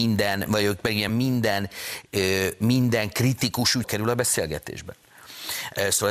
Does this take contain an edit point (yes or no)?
yes